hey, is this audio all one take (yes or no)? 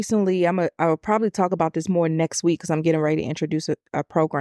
yes